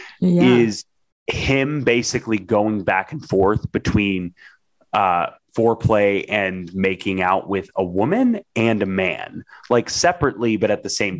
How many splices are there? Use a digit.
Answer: 0